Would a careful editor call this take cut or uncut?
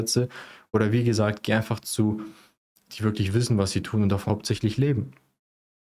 cut